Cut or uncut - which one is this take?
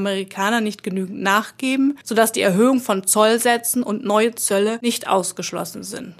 cut